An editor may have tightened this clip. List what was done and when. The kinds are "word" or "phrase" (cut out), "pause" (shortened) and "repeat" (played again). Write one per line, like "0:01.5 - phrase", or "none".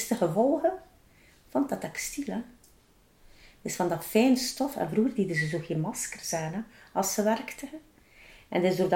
none